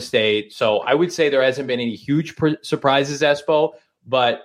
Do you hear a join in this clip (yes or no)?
no